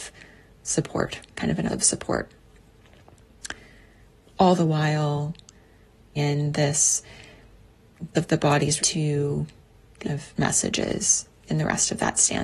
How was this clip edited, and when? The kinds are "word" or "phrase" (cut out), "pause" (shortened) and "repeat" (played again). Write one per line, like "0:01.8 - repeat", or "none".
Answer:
0:01.3 - word
0:01.7 - word
0:06.2 - word
0:08.1 - word
0:08.8 - word
0:10.0 - word
0:10.4 - word

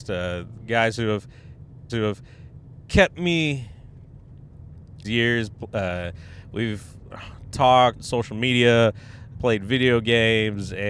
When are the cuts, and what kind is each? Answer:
0:01.9 - repeat
0:05.0 - phrase
0:08.0 - word
0:09.3 - word

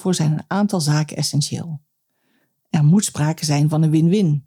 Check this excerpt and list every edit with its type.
none

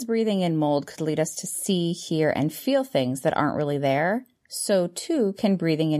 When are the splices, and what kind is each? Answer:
none

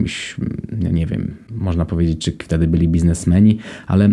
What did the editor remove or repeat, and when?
none

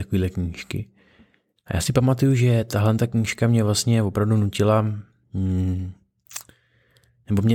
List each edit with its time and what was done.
none

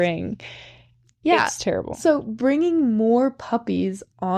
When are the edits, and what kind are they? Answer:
none

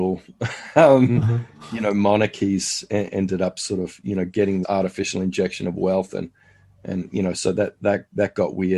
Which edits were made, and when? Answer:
0:04.6 - word

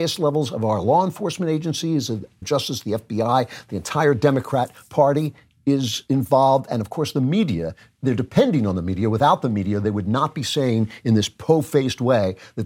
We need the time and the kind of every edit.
0:02.4 - phrase

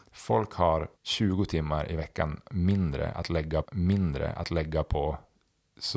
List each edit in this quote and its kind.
0:01.0 - pause
0:03.6 - repeat

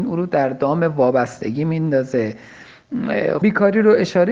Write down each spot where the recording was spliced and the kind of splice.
0:03.4 - word

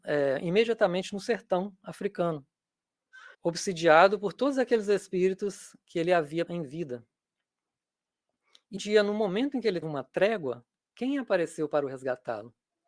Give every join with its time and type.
0:03.3 - pause
0:06.5 - word
0:08.8 - word
0:09.8 - word

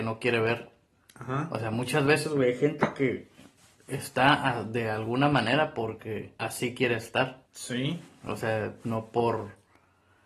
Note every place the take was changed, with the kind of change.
0:03.6 - pause
0:06.4 - pause
0:07.5 - pause

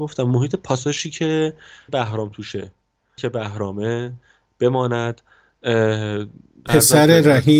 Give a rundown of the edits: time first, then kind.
0:01.9 - word
0:03.2 - word
0:06.7 - word

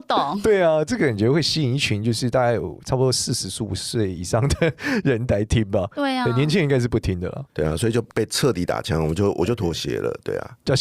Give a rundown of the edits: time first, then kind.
0:07.5 - pause
0:08.1 - pause

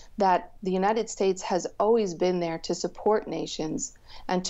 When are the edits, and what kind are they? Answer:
none

